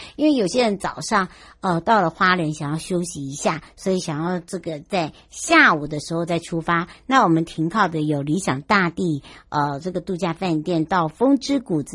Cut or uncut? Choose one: uncut